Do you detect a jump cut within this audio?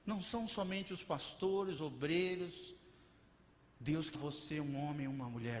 yes; 2 cuts; at 1.8 s, 4.1 s

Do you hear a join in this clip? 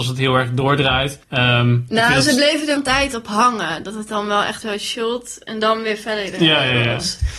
yes; 3 cuts; at 1.2 s, 2.8 s, 4.6 s

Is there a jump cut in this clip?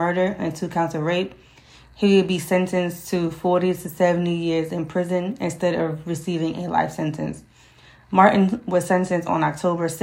no; 0 cuts

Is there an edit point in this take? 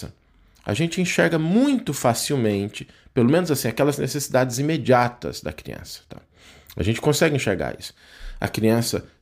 no; 0 cuts

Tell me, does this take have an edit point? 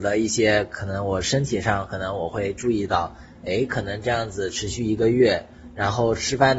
no; 0 cuts

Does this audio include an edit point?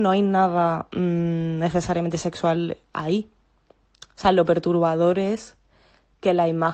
no; 0 cuts

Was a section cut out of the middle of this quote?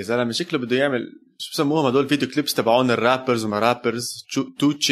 no; 0 cuts

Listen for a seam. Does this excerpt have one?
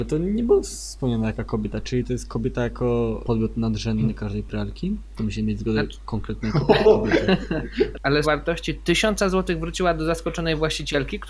yes; 3 cuts; at 3.2 s, 6.8 s, 8.2 s

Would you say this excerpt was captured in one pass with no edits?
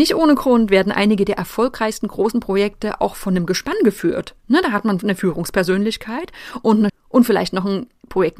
no; 1 cut; at 6.9 s

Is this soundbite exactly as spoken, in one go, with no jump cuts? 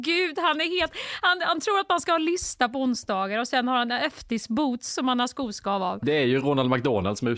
yes; 0 cuts

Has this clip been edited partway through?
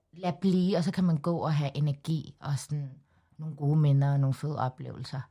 no; 0 cuts

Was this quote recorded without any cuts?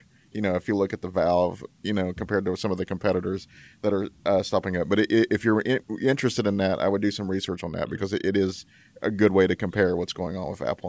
yes; 0 cuts

